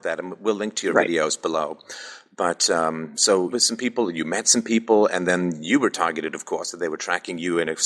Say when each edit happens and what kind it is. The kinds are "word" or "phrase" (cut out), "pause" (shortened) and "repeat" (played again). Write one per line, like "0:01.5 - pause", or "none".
0:03.5 - phrase